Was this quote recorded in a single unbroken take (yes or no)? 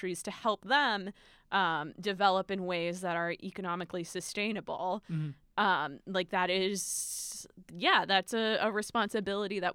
yes